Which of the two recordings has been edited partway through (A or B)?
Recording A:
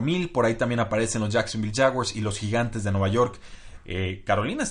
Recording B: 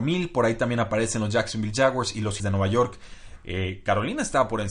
B